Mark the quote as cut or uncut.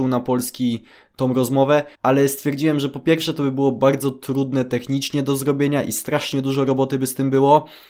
cut